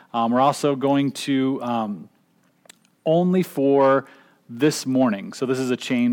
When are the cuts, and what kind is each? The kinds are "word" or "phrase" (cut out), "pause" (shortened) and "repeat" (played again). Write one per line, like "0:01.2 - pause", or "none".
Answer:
none